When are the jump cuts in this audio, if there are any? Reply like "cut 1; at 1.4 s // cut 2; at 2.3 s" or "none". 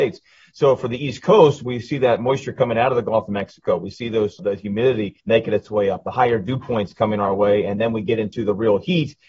cut 1; at 4.4 s // cut 2; at 5.2 s